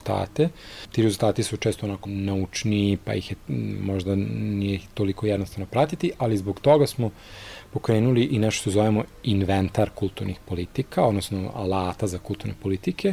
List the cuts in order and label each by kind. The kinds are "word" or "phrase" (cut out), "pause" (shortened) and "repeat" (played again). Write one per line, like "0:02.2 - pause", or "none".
0:02.0 - phrase